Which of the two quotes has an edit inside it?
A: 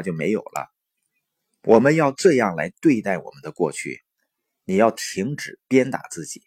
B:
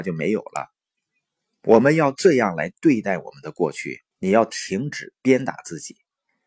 B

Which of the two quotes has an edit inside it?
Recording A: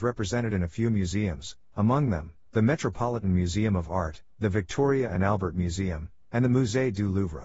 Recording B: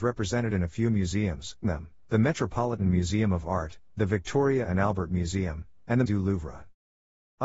B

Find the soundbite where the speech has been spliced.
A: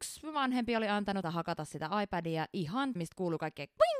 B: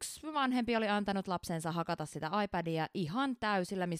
A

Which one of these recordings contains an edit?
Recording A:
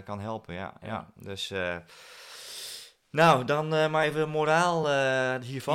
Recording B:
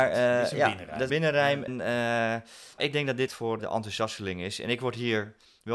B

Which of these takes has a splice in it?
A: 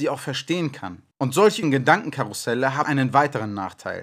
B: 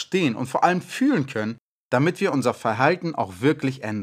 A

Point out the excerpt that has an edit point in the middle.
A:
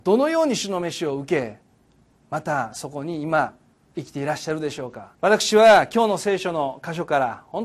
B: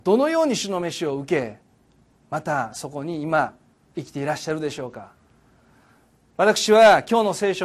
A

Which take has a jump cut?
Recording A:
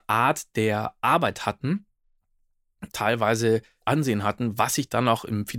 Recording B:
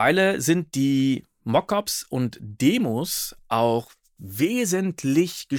A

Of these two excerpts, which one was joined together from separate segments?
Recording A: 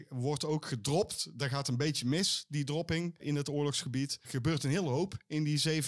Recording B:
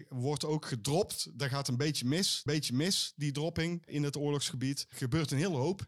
B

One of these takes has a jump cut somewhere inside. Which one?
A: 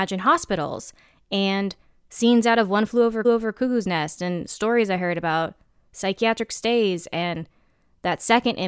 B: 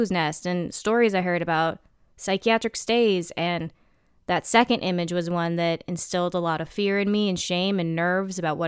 A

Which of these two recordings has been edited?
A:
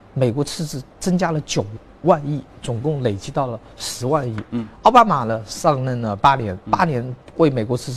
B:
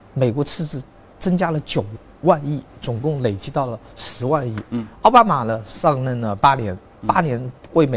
A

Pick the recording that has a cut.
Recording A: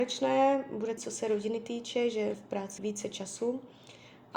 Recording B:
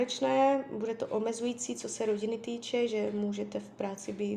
A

